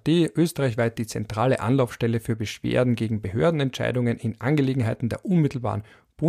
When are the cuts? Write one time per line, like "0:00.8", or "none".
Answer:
none